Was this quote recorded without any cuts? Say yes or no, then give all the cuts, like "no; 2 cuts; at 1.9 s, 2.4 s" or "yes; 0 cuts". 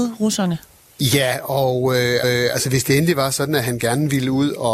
no; 1 cut; at 2.2 s